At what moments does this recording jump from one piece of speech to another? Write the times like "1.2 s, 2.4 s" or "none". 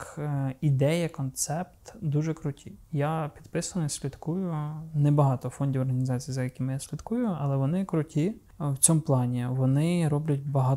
2.8 s